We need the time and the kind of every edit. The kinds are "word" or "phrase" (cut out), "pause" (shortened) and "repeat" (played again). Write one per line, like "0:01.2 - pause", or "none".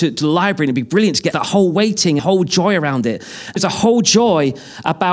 0:01.3 - phrase
0:02.2 - phrase
0:03.6 - word